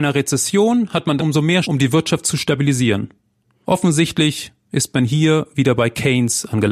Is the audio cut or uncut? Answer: cut